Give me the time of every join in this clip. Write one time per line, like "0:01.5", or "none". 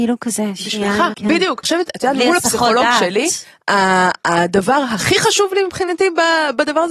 0:01.1
0:01.6